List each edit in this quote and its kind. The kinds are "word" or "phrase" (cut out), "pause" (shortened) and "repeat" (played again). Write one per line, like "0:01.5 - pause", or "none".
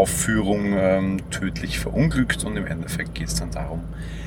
none